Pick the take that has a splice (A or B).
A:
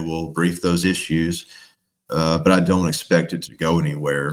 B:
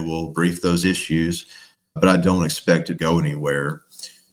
B